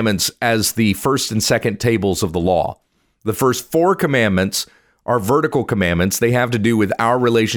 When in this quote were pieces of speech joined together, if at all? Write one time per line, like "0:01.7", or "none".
none